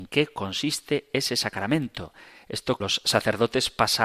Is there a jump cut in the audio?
yes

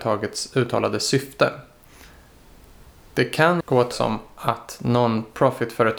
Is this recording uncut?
no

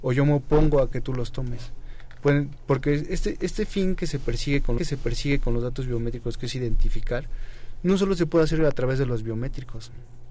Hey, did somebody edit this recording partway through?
yes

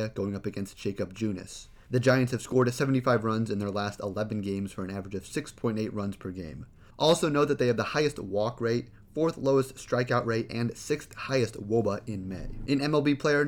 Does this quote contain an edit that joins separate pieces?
no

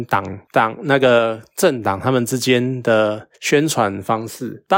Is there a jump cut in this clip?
yes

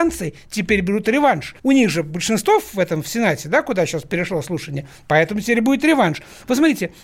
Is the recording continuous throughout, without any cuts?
no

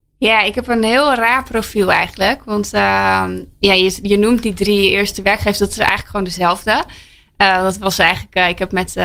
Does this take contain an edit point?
no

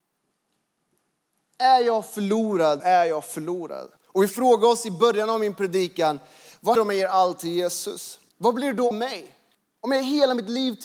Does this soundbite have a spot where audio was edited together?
yes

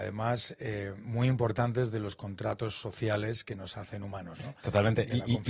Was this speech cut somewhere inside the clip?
no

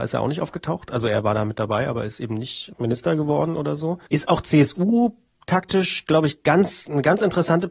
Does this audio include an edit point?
yes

